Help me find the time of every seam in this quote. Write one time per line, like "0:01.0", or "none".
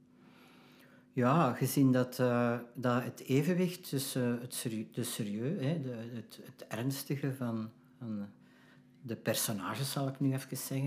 none